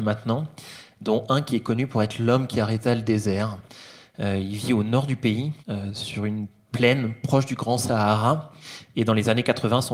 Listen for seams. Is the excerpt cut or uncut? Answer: cut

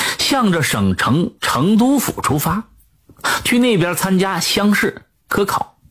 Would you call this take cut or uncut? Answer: cut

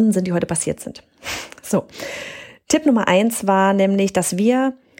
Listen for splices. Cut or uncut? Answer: uncut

